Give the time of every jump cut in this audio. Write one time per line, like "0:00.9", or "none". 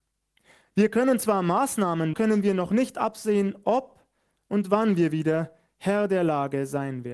0:02.1